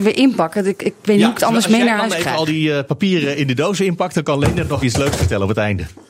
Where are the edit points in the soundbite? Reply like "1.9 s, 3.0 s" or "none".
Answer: 4.8 s

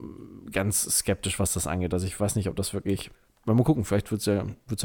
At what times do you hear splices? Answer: none

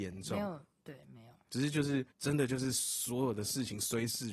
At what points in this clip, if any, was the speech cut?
2.1 s

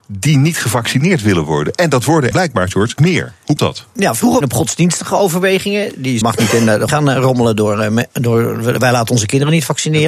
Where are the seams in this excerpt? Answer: 2.3 s, 3.0 s, 3.6 s, 4.4 s, 6.2 s, 6.9 s

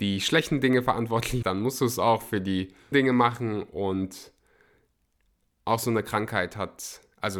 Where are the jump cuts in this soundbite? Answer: 1.4 s, 2.9 s

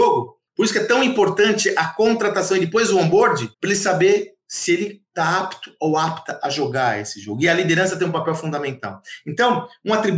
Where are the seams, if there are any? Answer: 3.5 s

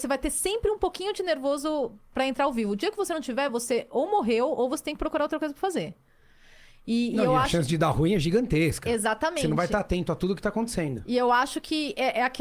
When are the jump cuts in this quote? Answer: none

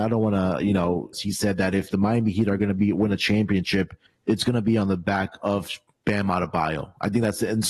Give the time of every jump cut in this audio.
1.1 s, 4.1 s

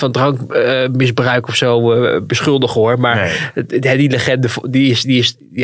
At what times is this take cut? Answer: none

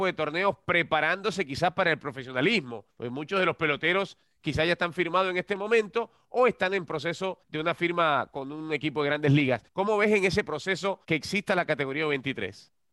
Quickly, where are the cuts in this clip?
2.9 s, 7.4 s, 9.7 s, 11.0 s

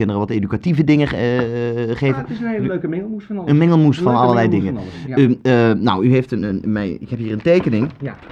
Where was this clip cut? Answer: none

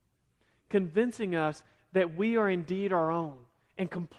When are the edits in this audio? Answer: none

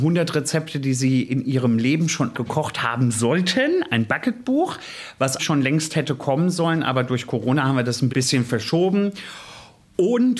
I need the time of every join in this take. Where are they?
2.3 s, 5.4 s, 8.1 s

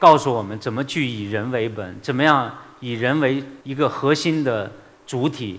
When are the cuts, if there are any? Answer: 3.6 s

